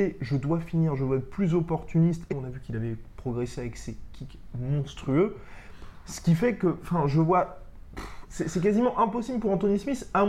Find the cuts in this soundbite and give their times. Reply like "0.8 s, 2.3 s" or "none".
2.3 s

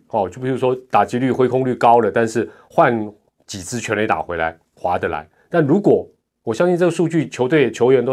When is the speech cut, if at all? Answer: none

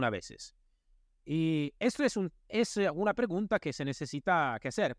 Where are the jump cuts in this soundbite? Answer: none

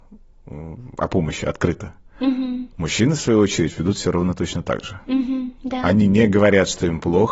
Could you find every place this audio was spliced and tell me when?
none

